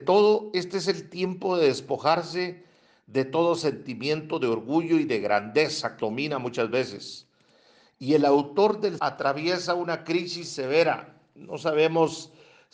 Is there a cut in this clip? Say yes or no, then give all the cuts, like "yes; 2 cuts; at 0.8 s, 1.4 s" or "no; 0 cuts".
yes; 2 cuts; at 6.0 s, 9.0 s